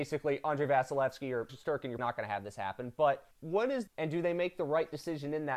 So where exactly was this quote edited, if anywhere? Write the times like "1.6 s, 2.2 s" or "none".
1.5 s, 2.0 s, 3.3 s, 3.9 s

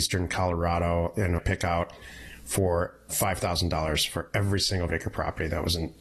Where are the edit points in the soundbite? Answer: 1.4 s, 3.1 s, 4.9 s

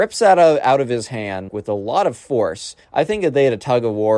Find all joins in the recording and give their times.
1.5 s, 2.8 s

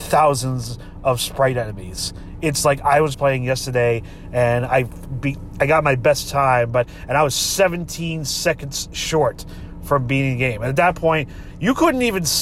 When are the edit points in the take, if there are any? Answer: 3.1 s

